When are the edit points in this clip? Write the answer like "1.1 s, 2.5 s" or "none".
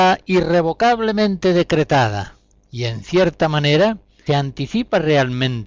4.3 s